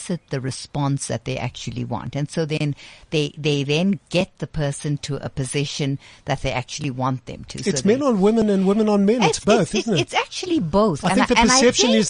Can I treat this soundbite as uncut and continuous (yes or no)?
yes